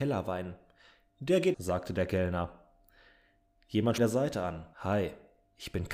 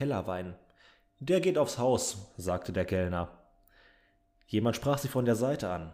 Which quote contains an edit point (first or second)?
first